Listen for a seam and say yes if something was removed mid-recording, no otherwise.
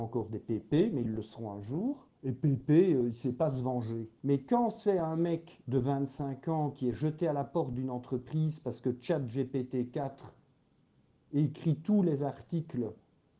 yes